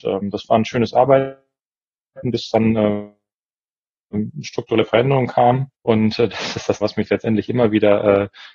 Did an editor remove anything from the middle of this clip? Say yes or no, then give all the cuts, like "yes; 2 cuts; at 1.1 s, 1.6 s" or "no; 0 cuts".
yes; 2 cuts; at 5.8 s, 6.8 s